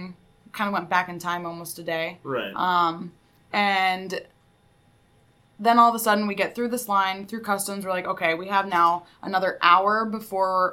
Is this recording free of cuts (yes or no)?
yes